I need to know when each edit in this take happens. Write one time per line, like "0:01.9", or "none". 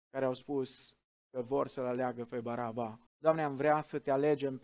0:03.1